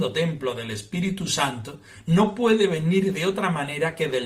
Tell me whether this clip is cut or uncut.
uncut